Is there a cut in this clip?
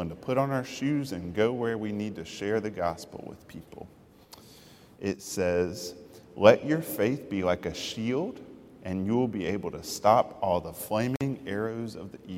no; 0 cuts

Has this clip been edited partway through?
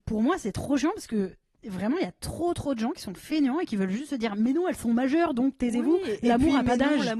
no; 0 cuts

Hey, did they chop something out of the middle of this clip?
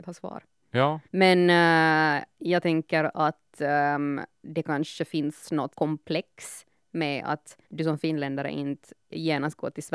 yes; 3 cuts; at 1.0 s, 5.7 s, 7.6 s

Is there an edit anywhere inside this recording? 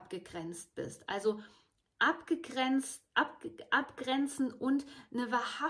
no; 0 cuts

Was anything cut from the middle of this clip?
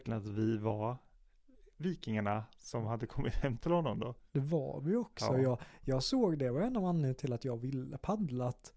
no; 0 cuts

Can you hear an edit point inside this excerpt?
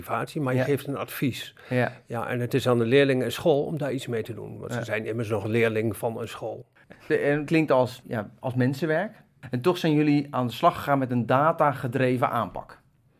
yes; 2 cuts; at 7.5 s, 8.0 s

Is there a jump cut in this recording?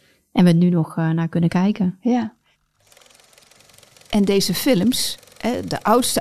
no; 0 cuts

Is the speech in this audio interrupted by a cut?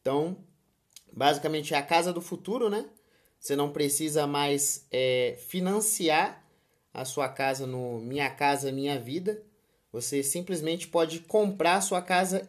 no; 0 cuts

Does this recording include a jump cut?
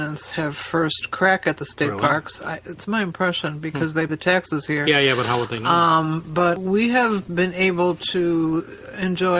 yes; 1 cut; at 4.1 s

